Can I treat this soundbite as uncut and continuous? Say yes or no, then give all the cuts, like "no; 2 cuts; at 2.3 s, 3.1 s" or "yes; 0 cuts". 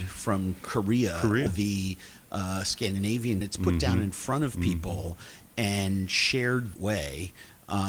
no; 3 cuts; at 1.5 s, 3.4 s, 6.7 s